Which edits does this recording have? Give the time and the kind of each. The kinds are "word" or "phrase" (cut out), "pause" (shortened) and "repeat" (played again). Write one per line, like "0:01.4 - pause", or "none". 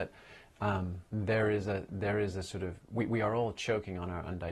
0:01.1 - pause